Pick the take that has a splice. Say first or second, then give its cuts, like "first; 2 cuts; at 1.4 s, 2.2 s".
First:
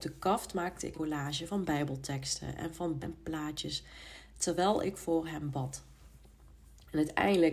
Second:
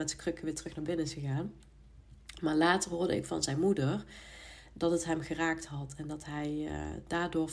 first; 2 cuts; at 0.9 s, 3.0 s